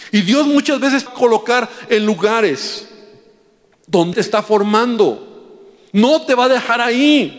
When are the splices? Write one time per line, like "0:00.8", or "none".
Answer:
0:01.1
0:04.1

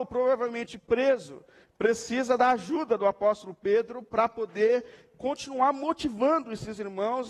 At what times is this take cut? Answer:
none

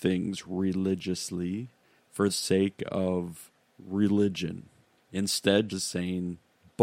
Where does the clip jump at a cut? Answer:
0:02.3
0:05.7

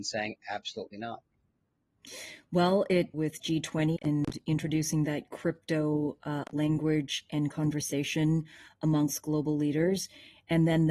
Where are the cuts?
0:03.1
0:04.0

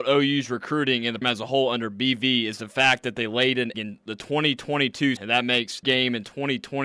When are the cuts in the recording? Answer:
0:01.2
0:03.7
0:05.2
0:05.8

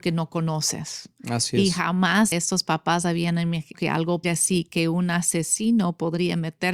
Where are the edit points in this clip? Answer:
0:02.3
0:03.7
0:04.2

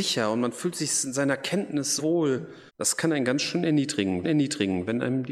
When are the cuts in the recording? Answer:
0:02.0
0:02.7
0:04.2

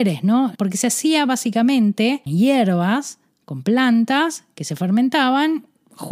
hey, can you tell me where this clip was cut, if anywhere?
0:02.3

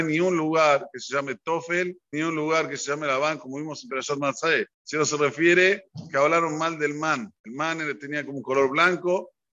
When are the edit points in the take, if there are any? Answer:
0:02.1
0:04.7
0:07.4

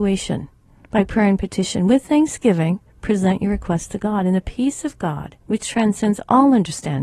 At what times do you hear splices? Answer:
0:02.9
0:05.4

